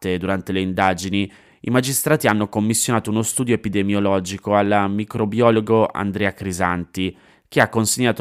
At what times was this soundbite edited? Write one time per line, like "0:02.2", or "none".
none